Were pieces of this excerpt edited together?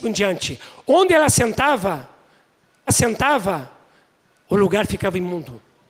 yes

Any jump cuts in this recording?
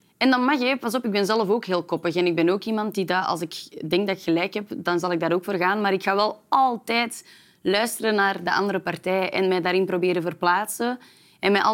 no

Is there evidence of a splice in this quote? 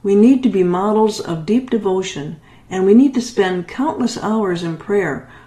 no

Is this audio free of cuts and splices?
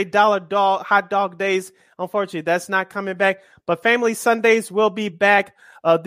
yes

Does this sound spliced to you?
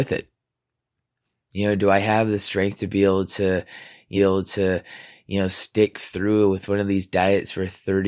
yes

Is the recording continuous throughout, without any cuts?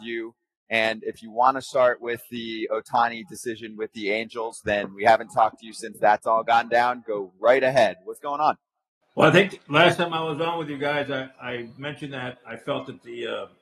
yes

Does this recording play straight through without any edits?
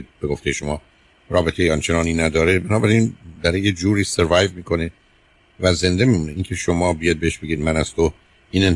yes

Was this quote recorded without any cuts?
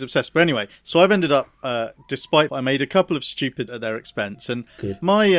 no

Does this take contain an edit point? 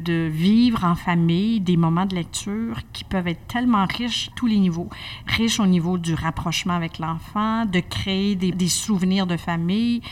yes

